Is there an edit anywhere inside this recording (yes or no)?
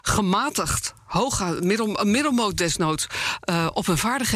no